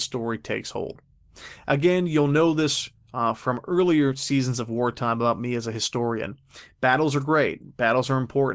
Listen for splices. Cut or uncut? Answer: uncut